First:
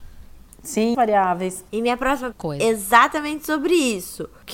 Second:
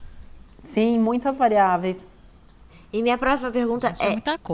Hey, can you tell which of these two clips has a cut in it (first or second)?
first